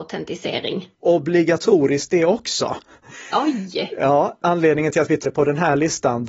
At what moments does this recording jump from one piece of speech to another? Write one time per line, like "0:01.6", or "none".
0:00.9
0:04.4
0:05.2